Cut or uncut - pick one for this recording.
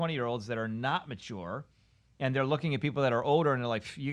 uncut